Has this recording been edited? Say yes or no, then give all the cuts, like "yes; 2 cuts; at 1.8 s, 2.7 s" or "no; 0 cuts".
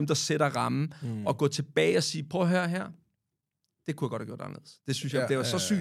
no; 0 cuts